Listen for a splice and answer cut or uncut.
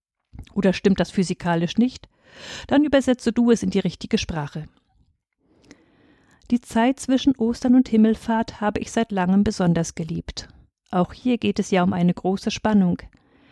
uncut